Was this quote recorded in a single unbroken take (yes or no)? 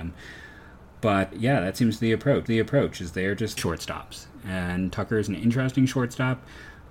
no